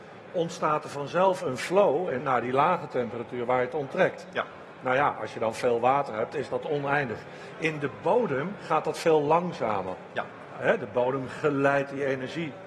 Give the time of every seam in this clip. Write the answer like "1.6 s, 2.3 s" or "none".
2.2 s